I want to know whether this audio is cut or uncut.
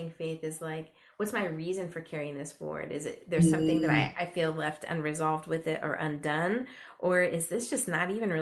uncut